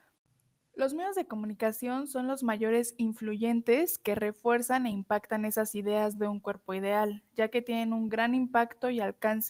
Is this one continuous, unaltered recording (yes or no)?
yes